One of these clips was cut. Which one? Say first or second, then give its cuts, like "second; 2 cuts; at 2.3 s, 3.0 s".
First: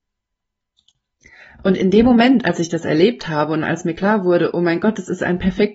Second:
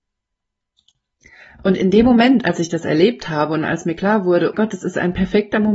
second; 1 cut; at 4.5 s